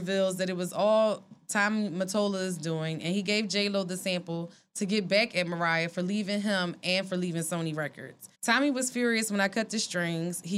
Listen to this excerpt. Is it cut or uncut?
cut